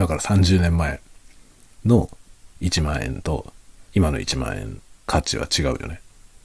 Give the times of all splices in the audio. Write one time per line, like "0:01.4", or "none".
0:02.5
0:03.9
0:05.0